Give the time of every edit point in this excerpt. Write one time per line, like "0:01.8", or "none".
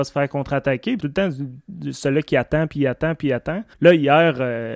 0:01.0
0:03.7